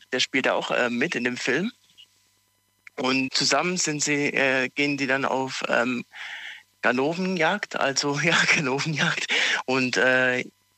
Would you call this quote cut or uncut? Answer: cut